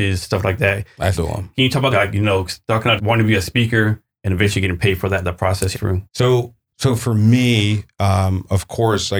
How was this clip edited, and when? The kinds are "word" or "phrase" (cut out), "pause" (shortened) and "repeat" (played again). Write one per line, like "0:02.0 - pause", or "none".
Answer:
0:01.1 - word
0:01.9 - phrase
0:03.0 - word
0:05.7 - phrase
0:06.1 - pause